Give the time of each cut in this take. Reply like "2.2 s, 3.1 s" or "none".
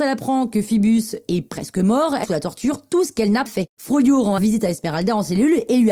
2.2 s, 3.5 s, 4.4 s